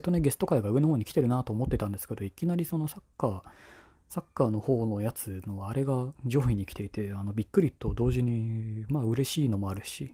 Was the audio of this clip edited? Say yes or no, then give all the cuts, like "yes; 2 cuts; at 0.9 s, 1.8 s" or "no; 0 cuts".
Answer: yes; 1 cut; at 6.1 s